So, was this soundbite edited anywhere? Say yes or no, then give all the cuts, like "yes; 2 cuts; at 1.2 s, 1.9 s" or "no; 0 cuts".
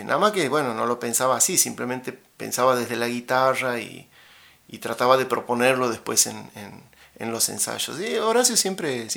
no; 0 cuts